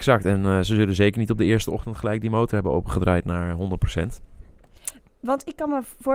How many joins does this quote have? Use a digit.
0